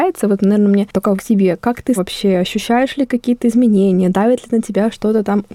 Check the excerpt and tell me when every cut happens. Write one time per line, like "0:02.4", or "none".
0:01.2
0:02.0